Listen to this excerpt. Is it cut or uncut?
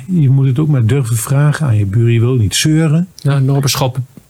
uncut